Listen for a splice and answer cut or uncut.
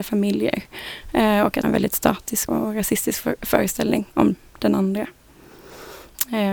cut